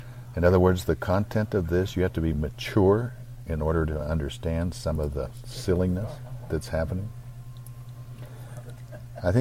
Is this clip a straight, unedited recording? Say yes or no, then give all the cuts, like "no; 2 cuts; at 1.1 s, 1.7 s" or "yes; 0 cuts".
yes; 0 cuts